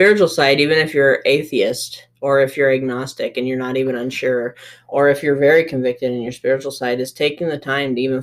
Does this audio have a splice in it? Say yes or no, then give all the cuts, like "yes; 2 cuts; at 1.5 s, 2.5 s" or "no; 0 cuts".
yes; 1 cut; at 2.1 s